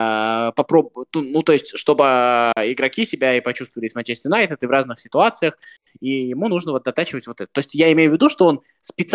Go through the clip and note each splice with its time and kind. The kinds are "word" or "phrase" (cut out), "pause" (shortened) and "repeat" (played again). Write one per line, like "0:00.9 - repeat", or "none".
none